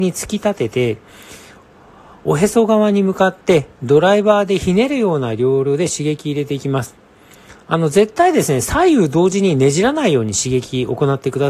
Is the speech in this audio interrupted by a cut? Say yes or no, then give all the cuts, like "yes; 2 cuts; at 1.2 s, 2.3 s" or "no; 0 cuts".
no; 0 cuts